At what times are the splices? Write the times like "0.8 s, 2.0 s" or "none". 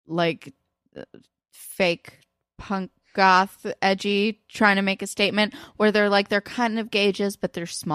none

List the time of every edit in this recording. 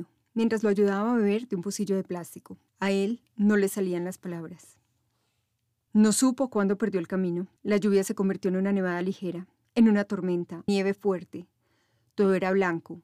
2.7 s, 7.6 s, 10.7 s

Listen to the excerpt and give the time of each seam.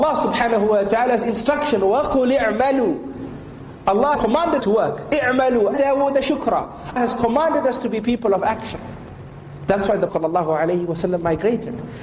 4.1 s, 4.6 s, 5.7 s, 7.0 s, 10.1 s

